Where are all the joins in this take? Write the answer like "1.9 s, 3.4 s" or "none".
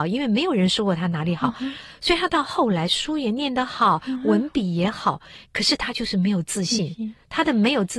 5.4 s